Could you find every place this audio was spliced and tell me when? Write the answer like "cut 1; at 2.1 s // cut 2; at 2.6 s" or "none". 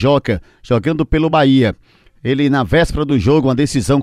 none

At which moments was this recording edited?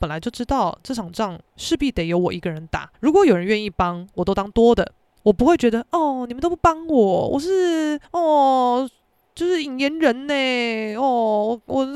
cut 1; at 1.5 s // cut 2; at 2.9 s // cut 3; at 8.0 s

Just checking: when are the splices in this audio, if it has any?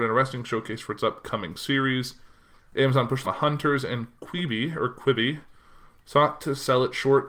cut 1; at 3.2 s

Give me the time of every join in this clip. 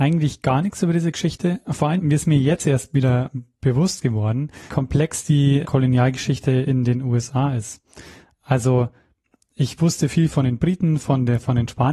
cut 1; at 2.0 s // cut 2; at 4.7 s // cut 3; at 5.6 s

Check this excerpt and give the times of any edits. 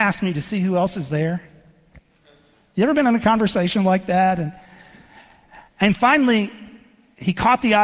none

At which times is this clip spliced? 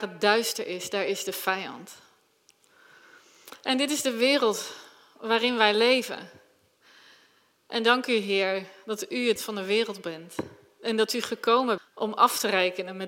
cut 1; at 9.4 s // cut 2; at 11.8 s

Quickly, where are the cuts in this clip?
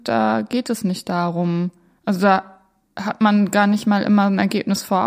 none

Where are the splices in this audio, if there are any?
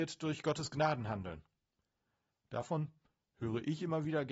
none

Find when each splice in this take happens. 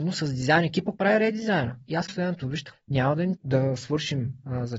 cut 1; at 1.0 s // cut 2; at 2.1 s // cut 3; at 2.7 s // cut 4; at 3.4 s

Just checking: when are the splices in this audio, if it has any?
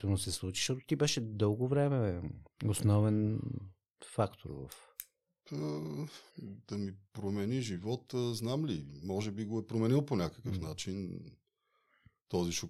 cut 1; at 6.3 s // cut 2; at 7.0 s

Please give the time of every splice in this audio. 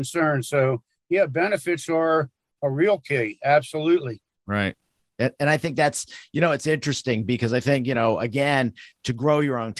none

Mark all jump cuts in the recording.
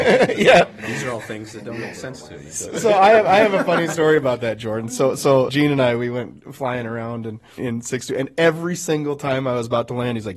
cut 1; at 5.5 s // cut 2; at 7.6 s

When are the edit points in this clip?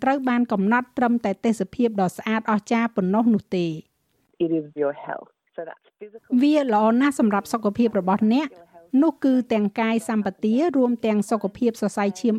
cut 1; at 4.8 s

